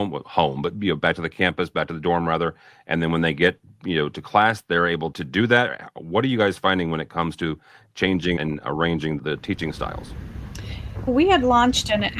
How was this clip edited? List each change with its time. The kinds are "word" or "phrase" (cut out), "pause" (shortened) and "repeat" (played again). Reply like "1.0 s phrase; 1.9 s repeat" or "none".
5.1 s word; 8.4 s word; 9.2 s word; 11.1 s word